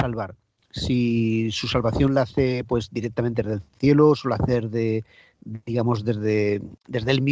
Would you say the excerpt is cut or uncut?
uncut